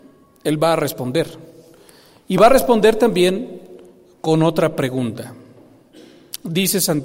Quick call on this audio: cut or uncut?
uncut